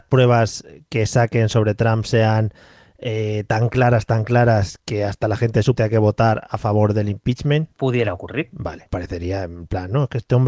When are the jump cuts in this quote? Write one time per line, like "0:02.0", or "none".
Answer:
0:05.8
0:07.7
0:08.9